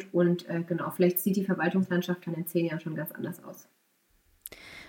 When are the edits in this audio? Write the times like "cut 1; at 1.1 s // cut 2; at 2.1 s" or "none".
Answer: none